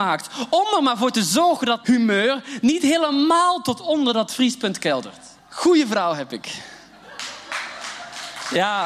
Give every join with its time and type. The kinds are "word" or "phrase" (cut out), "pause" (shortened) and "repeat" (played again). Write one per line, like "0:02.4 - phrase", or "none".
0:01.8 - word
0:05.4 - pause